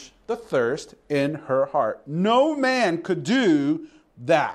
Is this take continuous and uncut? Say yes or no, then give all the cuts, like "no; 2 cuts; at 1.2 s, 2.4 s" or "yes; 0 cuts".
yes; 0 cuts